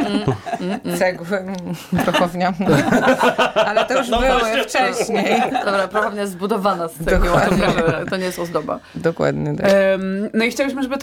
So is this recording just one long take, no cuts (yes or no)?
yes